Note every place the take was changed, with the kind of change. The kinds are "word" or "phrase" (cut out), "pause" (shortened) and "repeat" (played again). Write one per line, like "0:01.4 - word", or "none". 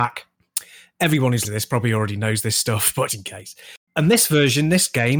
0:01.4 - word
0:03.1 - word
0:03.8 - pause